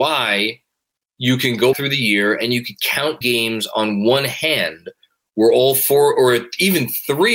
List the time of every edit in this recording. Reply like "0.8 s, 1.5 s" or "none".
1.7 s, 3.2 s